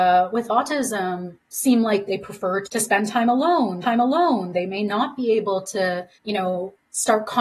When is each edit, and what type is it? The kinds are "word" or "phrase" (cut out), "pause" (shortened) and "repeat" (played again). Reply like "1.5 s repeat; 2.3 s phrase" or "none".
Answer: 1.4 s pause; 2.1 s word; 2.6 s word; 3.8 s repeat; 6.1 s pause